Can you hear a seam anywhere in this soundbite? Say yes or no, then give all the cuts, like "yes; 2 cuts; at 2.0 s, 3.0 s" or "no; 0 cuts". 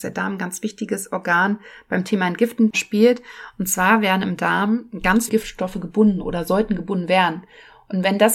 yes; 1 cut; at 5.3 s